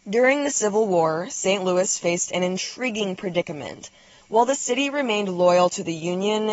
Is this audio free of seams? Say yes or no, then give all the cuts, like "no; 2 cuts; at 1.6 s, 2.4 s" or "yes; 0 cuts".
yes; 0 cuts